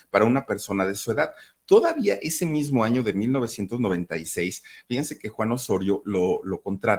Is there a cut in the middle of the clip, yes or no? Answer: no